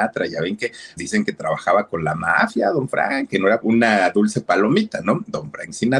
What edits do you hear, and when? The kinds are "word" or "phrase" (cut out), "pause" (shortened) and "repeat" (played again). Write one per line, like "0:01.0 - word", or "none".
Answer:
0:01.0 - word
0:03.6 - phrase